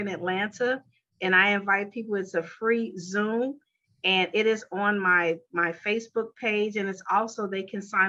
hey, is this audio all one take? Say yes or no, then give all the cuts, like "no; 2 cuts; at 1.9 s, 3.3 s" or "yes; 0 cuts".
yes; 0 cuts